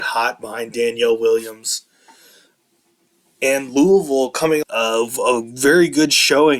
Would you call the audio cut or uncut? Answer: cut